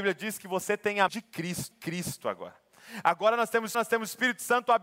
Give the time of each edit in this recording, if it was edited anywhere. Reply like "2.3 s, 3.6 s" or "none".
1.1 s, 1.7 s, 3.7 s